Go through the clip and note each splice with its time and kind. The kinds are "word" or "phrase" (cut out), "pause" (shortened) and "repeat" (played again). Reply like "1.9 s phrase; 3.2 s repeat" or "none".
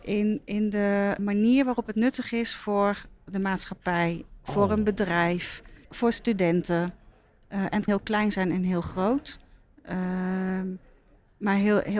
1.2 s word; 5.8 s word; 7.9 s word